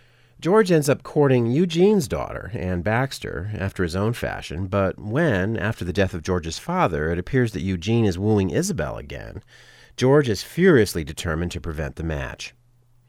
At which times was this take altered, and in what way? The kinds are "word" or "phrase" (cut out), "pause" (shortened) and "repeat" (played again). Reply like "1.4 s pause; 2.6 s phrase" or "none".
none